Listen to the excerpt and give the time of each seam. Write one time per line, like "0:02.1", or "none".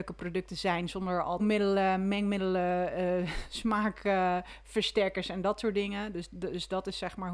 0:01.4